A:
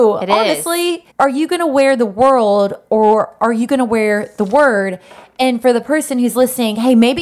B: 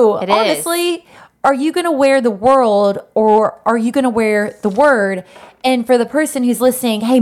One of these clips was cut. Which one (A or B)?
A